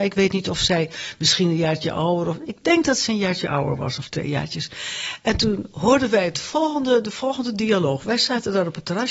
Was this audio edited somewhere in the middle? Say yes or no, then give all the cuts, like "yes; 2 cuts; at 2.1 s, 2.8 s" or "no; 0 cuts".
no; 0 cuts